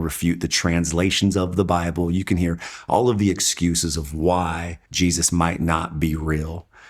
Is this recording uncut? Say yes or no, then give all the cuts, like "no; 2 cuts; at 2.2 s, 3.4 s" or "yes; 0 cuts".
no; 1 cut; at 4.9 s